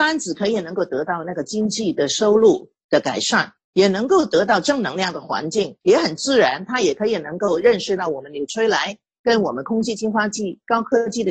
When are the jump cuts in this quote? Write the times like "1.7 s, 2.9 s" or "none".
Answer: 3.6 s, 5.8 s